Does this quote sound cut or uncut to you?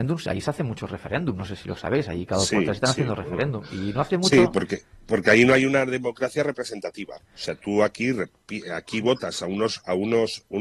uncut